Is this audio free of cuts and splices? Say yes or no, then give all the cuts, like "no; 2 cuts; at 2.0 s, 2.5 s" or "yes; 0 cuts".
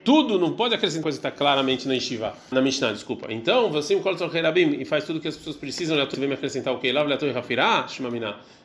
no; 3 cuts; at 1.0 s, 2.5 s, 6.1 s